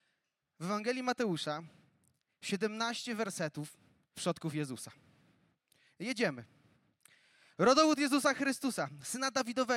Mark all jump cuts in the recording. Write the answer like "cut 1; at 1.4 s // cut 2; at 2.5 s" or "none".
cut 1; at 4.1 s